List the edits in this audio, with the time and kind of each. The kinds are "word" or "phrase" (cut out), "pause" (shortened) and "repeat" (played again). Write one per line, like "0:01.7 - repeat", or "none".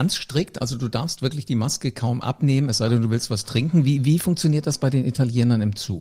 none

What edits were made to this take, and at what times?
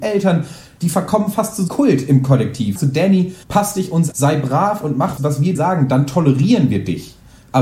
0:01.7 - word
0:02.8 - phrase
0:03.4 - pause
0:04.1 - word
0:05.2 - word
0:05.5 - word

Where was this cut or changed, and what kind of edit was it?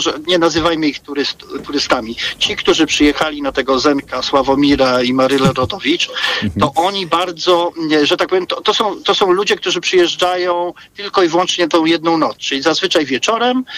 none

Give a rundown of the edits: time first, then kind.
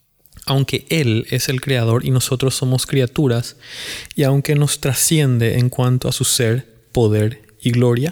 none

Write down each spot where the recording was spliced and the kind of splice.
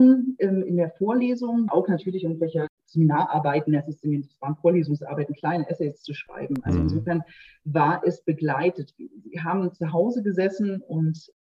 0:01.7 - word

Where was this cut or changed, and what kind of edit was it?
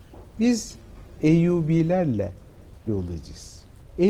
0:01.2 - phrase
0:02.9 - word

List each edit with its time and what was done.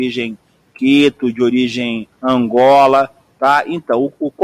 0:02.1 - pause

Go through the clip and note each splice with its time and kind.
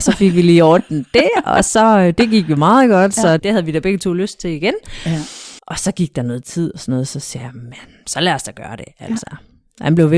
0:03.4 - word
0:05.6 - pause

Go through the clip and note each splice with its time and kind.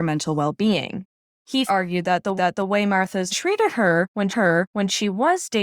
0:01.7 - word
0:02.4 - repeat
0:03.3 - phrase
0:04.3 - repeat

